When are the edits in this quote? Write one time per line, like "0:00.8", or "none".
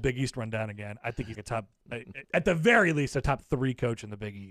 0:01.3
0:02.2

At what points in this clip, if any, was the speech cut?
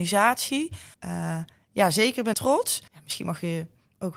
0:00.9
0:02.3
0:02.9

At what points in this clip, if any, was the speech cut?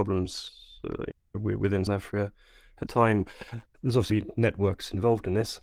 0:01.9
0:02.9
0:04.1

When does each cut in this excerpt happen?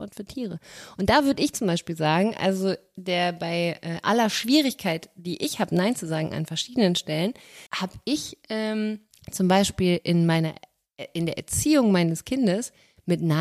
0:07.7
0:09.1

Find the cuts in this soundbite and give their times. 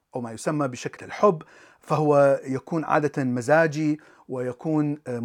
0:01.0

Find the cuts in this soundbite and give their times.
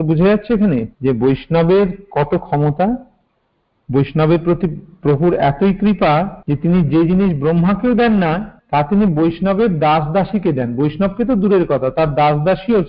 0:00.9
0:03.3
0:06.4
0:08.6

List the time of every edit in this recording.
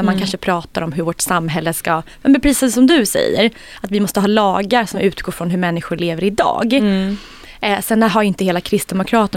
none

